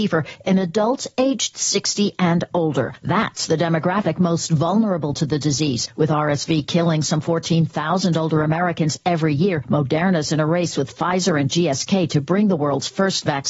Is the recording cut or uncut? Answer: uncut